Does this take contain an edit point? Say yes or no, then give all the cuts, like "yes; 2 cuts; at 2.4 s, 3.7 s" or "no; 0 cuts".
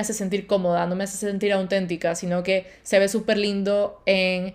no; 0 cuts